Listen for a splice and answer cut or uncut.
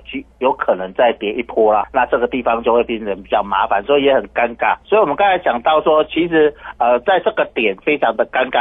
cut